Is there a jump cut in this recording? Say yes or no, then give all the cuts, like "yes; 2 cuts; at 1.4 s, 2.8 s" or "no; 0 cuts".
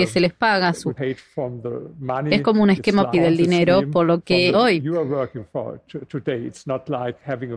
yes; 3 cuts; at 0.9 s, 3.1 s, 4.5 s